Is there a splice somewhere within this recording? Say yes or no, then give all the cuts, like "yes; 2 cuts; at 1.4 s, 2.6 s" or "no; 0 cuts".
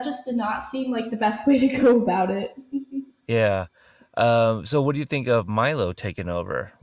no; 0 cuts